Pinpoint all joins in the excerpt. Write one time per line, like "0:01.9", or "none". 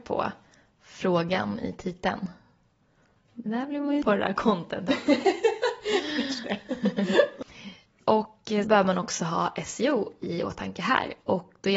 0:03.5
0:04.0
0:06.4
0:08.6